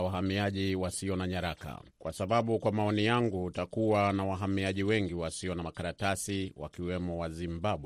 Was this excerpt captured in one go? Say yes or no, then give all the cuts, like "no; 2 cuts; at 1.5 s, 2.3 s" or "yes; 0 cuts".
no; 1 cut; at 1.9 s